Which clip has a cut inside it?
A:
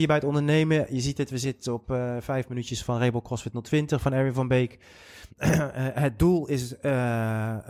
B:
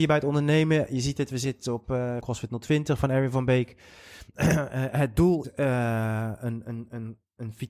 B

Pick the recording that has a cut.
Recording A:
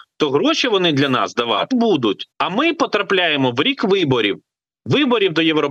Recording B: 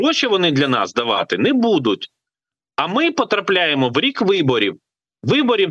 A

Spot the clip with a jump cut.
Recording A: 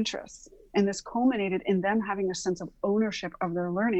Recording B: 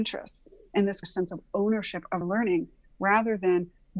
B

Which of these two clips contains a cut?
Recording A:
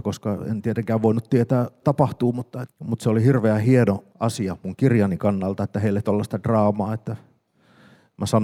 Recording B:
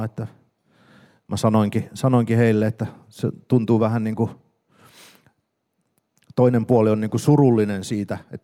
A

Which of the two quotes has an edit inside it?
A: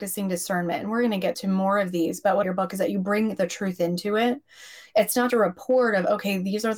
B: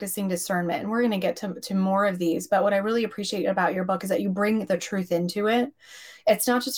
A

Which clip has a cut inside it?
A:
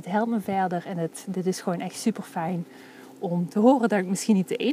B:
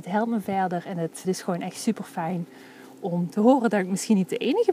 B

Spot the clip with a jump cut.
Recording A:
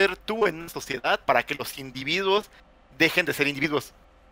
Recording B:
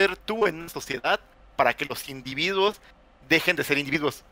A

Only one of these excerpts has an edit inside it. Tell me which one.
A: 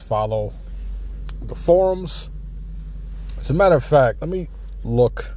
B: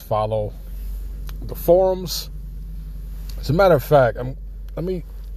A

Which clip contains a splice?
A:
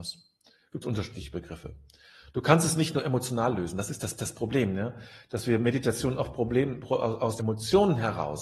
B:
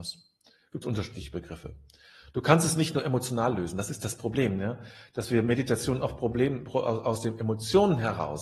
A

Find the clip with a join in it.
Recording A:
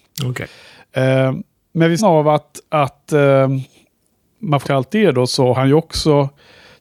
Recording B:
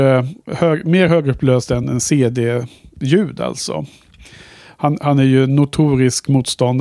A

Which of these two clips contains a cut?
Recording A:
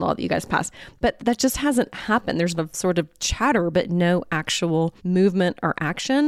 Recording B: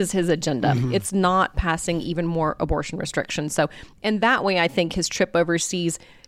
A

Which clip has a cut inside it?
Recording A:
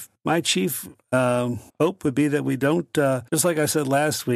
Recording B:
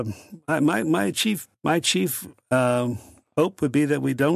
A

